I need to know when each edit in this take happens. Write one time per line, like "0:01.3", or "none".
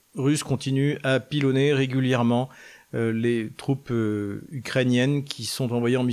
none